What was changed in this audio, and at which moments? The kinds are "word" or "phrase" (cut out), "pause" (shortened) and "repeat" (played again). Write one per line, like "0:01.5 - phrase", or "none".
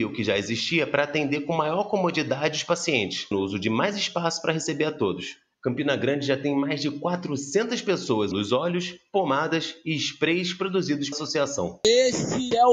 0:03.3 - word
0:08.3 - word
0:11.1 - word

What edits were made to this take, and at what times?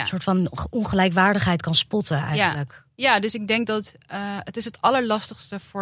none

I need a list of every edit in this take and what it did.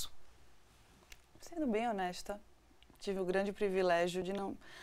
none

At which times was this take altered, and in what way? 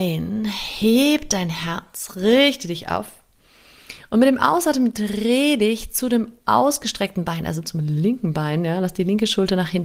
none

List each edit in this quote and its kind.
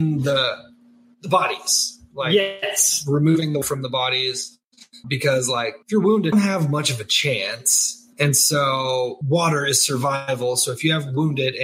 0:03.6 - word
0:05.0 - word
0:05.8 - pause
0:06.3 - phrase
0:08.1 - pause
0:09.2 - word

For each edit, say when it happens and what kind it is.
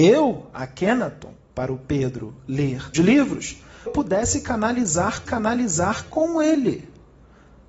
0:01.5 - word
0:02.9 - word
0:03.9 - phrase
0:05.3 - repeat

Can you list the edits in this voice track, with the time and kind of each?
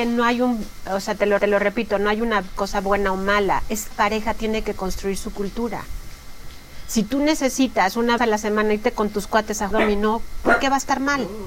0:01.4 - repeat
0:03.9 - word
0:08.2 - word
0:09.7 - word

